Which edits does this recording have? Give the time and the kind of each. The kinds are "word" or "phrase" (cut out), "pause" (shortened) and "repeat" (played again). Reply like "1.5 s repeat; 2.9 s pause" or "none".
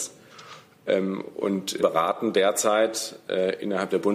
1.8 s word